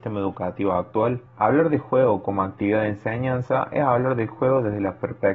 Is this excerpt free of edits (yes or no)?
no